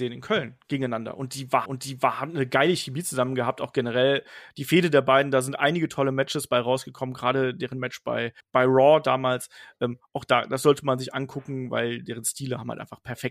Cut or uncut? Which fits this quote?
cut